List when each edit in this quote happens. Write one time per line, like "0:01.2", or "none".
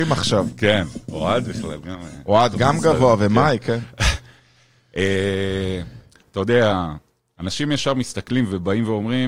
none